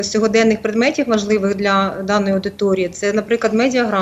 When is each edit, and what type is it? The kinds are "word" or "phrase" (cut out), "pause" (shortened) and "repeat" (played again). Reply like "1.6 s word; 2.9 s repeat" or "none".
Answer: none